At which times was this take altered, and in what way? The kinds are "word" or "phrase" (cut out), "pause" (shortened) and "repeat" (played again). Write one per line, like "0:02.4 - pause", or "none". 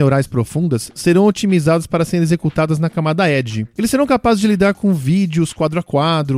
none